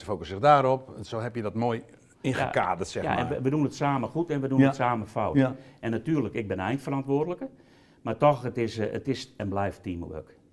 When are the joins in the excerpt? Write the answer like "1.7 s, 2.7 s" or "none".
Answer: none